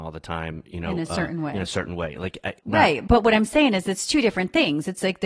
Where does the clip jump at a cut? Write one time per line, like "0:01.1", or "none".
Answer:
none